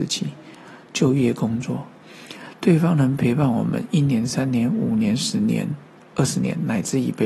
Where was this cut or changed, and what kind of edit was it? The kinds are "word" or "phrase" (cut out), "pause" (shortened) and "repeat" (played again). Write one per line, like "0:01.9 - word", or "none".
none